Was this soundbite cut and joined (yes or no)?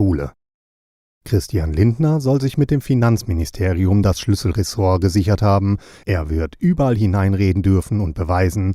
no